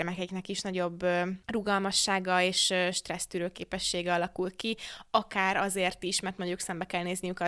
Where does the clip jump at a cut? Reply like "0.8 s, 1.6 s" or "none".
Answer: none